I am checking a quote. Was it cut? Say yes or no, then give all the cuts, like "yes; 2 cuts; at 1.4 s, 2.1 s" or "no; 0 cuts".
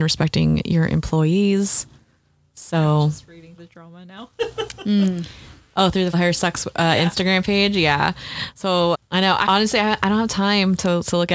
yes; 4 cuts; at 3.6 s, 6.1 s, 8.9 s, 9.5 s